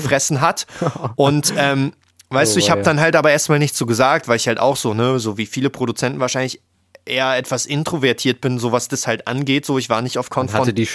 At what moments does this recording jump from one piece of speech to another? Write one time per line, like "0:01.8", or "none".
none